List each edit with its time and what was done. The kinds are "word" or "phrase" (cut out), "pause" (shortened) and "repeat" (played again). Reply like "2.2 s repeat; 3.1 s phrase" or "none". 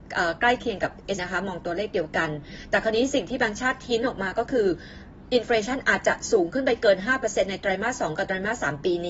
1.2 s word